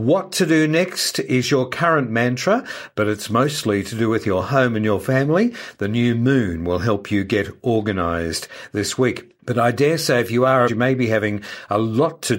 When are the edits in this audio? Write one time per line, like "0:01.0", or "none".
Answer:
0:09.4
0:10.7